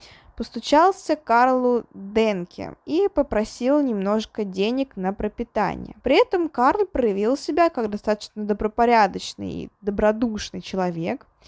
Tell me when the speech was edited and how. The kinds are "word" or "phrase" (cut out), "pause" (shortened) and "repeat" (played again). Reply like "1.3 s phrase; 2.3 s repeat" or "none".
2.8 s pause; 6.0 s pause